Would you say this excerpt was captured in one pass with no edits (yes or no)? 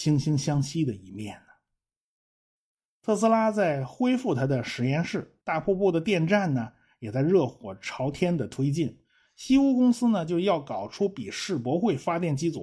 no